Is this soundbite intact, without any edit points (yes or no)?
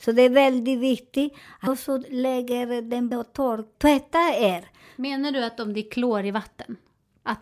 no